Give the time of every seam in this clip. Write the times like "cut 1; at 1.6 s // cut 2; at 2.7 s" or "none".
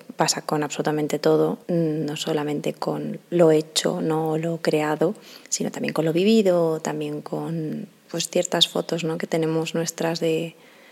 cut 1; at 1.6 s // cut 2; at 5.4 s